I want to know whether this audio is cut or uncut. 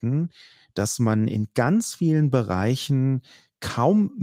uncut